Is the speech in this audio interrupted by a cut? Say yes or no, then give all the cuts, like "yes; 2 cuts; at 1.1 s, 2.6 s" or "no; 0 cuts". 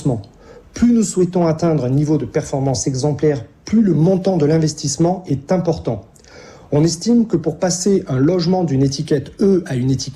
no; 0 cuts